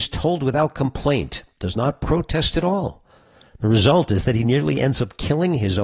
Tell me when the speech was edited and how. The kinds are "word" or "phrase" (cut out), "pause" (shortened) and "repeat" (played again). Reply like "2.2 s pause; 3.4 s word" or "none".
none